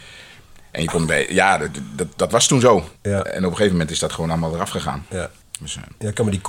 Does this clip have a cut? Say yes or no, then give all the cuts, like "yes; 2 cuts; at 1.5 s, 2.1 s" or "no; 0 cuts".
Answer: yes; 2 cuts; at 3.0 s, 5.4 s